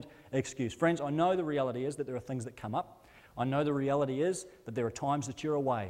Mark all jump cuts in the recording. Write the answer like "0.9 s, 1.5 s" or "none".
none